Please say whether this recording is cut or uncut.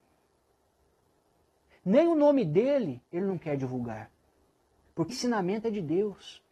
cut